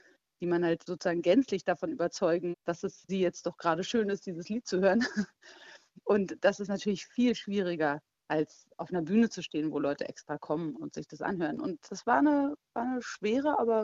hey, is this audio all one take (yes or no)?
no